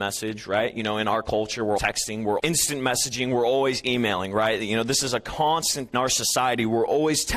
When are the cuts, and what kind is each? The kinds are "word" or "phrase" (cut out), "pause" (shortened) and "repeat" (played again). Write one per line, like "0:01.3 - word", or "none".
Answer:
0:01.8 - word
0:02.4 - word
0:05.9 - phrase